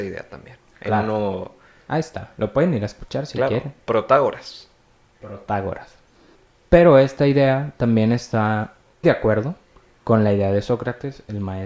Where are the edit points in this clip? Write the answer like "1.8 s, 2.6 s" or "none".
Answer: 9.0 s